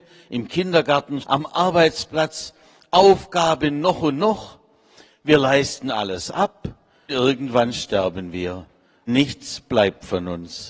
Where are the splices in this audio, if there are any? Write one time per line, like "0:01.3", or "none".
0:01.2
0:07.1
0:09.1